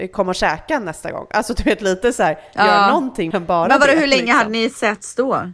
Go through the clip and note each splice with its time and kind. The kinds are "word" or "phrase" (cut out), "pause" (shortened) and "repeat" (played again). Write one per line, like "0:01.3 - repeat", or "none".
0:03.3 - word